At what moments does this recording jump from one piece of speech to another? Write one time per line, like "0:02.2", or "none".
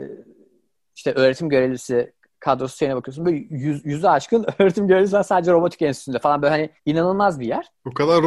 0:06.8